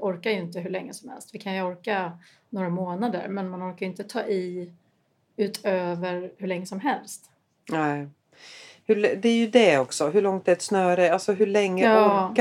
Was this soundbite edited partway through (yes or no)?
no